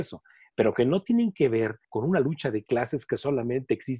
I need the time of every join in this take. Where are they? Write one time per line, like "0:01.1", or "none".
0:01.8